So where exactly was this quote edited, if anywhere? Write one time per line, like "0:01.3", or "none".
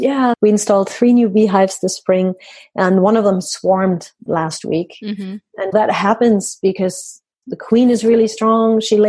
0:05.7
0:07.4